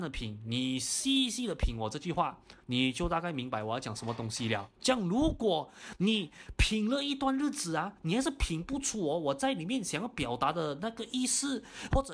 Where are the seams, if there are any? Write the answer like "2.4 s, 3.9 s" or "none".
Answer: 2.6 s